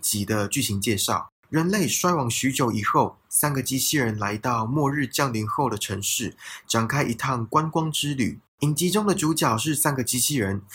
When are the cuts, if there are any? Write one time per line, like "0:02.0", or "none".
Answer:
0:01.4
0:08.5